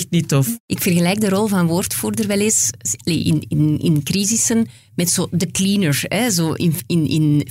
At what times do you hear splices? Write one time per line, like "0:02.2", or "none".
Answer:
none